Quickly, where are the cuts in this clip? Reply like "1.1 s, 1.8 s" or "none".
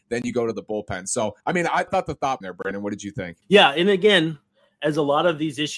1.4 s, 1.9 s, 2.4 s, 3.4 s